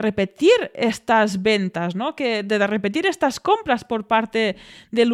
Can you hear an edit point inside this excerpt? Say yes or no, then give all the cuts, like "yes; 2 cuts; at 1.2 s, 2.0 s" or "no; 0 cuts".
no; 0 cuts